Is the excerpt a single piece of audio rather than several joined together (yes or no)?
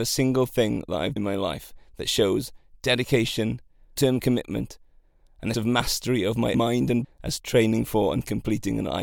no